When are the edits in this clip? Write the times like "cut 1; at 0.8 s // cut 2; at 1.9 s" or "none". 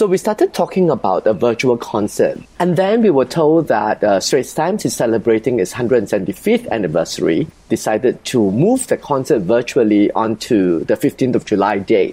cut 1; at 2.4 s